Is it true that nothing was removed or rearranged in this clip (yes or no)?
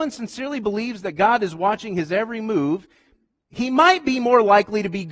yes